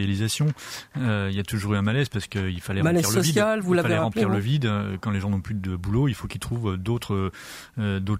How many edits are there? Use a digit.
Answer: 0